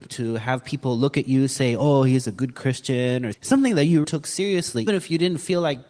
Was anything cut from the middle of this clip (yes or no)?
yes